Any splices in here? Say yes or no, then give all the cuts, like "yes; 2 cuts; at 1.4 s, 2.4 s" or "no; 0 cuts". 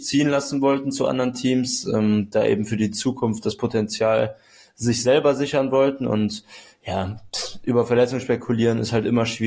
no; 0 cuts